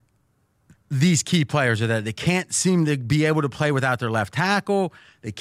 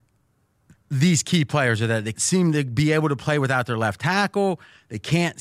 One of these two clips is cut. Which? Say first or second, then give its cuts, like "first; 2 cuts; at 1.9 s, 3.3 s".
second; 1 cut; at 2.1 s